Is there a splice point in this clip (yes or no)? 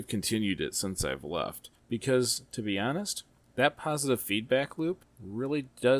no